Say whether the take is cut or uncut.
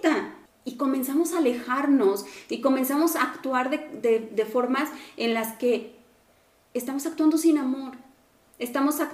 uncut